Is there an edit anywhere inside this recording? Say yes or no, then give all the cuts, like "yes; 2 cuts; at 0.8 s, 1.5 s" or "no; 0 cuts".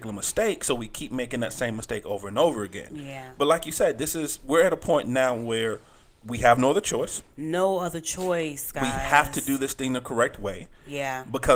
no; 0 cuts